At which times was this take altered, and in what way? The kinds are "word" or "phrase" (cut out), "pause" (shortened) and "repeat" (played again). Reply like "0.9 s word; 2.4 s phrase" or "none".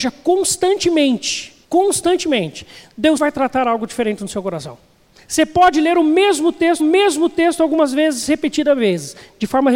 1.6 s pause; 3.2 s word; 5.1 s pause; 6.8 s repeat